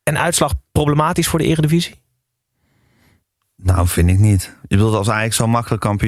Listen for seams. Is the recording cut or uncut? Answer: uncut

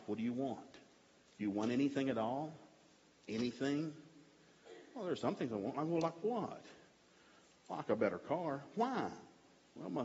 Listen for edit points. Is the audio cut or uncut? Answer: uncut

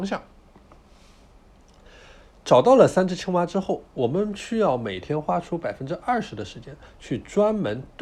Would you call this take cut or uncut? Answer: uncut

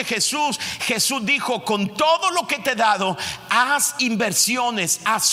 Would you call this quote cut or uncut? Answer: uncut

